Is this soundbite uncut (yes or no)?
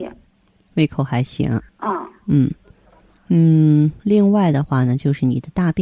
no